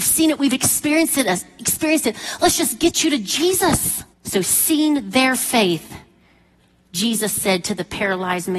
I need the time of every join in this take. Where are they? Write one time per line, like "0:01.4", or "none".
0:04.1